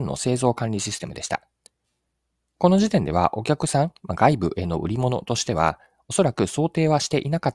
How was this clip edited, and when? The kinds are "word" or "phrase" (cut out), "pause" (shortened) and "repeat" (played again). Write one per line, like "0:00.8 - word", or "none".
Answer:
none